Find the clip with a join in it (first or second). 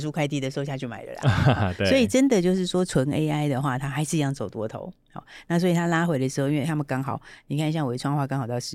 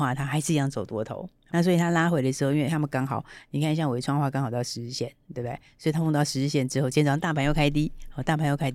second